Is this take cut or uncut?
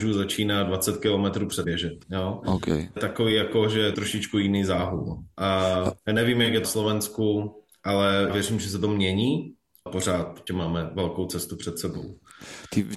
cut